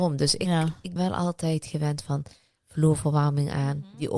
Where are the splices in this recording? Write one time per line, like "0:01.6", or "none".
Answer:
0:01.0